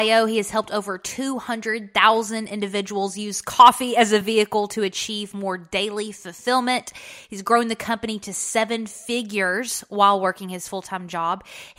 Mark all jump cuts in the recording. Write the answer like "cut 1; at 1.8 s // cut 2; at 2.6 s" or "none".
none